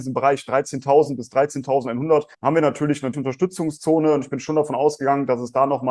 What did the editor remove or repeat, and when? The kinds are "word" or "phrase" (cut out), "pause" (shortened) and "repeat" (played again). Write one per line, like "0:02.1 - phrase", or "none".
0:02.3 - pause
0:03.1 - word